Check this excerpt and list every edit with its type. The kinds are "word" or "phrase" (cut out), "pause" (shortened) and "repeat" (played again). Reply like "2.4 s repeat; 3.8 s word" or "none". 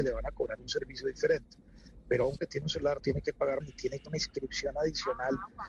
2.4 s word; 3.0 s word; 3.6 s phrase; 4.1 s word